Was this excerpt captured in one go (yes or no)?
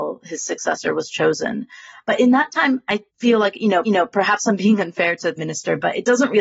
no